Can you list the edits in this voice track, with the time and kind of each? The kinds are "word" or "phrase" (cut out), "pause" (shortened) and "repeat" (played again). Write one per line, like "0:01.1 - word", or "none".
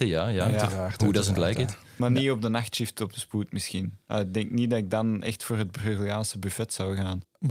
none